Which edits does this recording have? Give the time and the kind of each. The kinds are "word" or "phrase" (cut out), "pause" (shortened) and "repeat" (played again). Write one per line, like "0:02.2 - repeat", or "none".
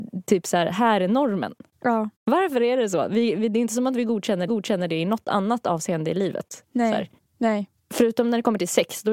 0:02.1 - pause
0:04.5 - repeat